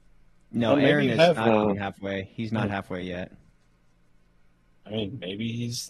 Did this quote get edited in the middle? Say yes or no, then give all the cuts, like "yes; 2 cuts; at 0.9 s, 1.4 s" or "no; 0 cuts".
no; 0 cuts